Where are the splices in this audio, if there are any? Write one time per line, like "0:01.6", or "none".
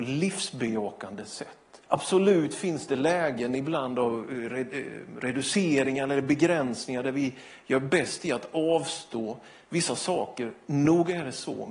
0:01.8